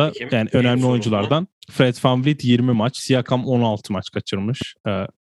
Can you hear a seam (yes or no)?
yes